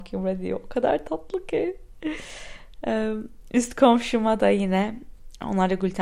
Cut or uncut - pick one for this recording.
uncut